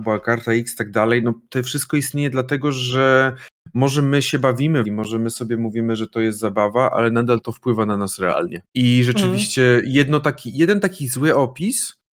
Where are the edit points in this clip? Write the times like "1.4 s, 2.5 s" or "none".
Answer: 4.8 s, 7.4 s, 8.7 s